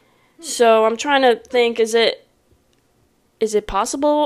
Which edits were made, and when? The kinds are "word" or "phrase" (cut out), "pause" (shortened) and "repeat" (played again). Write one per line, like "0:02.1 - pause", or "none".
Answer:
none

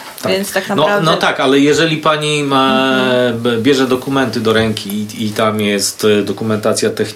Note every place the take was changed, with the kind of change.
none

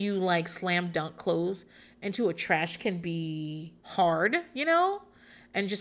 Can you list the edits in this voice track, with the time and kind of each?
0:02.8 - word
0:03.8 - pause

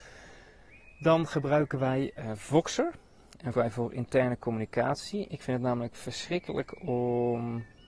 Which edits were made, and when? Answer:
0:03.5 - phrase

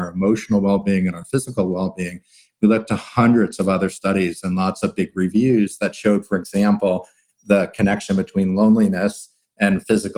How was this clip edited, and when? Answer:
none

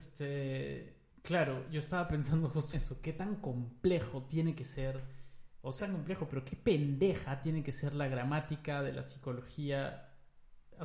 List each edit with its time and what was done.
0:01.1 - pause
0:02.7 - word
0:05.8 - phrase

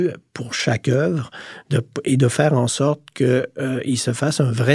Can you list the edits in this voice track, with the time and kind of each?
none

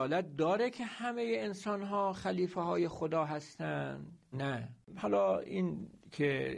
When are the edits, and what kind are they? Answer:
0:04.3 - word

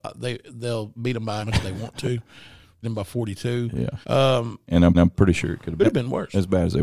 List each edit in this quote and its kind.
0:01.0 - word
0:01.4 - word
0:02.8 - phrase
0:04.0 - pause
0:04.9 - repeat
0:05.8 - phrase

